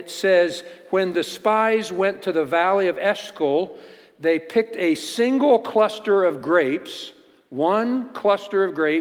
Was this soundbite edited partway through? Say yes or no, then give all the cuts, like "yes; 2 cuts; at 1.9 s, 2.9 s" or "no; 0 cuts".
no; 0 cuts